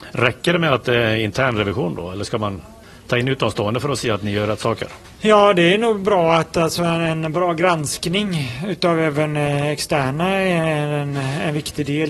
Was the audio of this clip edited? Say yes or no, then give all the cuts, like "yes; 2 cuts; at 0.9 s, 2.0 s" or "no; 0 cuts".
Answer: yes; 1 cut; at 2.8 s